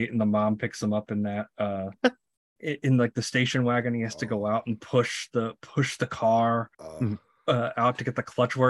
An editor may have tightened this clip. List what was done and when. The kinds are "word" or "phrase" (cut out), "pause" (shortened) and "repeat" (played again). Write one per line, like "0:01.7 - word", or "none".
0:06.7 - pause